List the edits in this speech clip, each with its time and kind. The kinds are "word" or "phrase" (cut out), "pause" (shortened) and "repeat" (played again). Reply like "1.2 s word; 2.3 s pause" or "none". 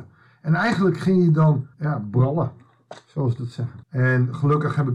1.7 s pause; 3.8 s pause

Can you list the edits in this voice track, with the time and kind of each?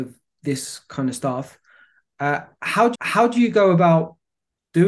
2.9 s repeat

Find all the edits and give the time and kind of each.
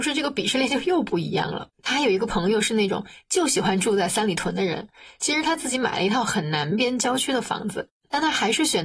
1.7 s pause

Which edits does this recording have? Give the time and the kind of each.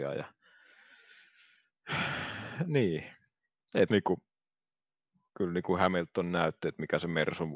3.9 s word

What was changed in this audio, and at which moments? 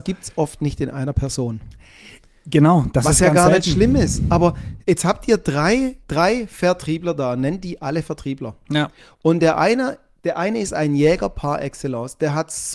4.8 s pause; 6.0 s pause

